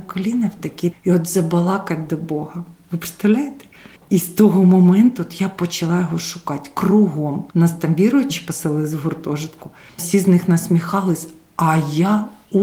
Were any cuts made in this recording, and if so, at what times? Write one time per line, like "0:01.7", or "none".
0:00.9
0:07.5
0:10.0